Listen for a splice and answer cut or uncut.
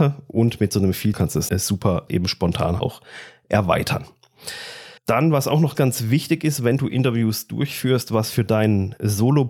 cut